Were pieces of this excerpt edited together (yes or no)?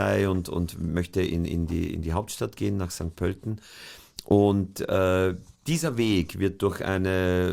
no